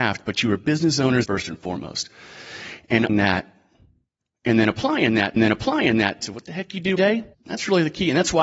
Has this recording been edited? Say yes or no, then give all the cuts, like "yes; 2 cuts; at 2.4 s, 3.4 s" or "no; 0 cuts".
yes; 5 cuts; at 1.2 s, 3.1 s, 5.4 s, 7.0 s, 7.3 s